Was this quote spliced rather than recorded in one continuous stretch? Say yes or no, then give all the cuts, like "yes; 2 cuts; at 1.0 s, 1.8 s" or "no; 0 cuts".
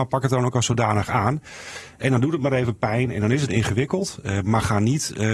no; 0 cuts